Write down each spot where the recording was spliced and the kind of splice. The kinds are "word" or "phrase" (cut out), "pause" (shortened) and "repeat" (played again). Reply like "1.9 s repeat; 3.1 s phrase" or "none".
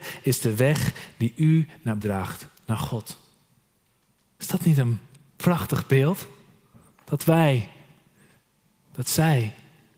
2.0 s word; 6.7 s pause